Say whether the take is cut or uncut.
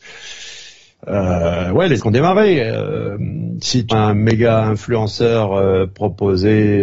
cut